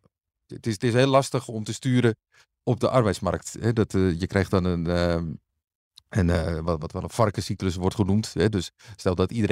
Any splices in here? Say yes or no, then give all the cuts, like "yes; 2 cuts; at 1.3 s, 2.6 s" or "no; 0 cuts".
no; 0 cuts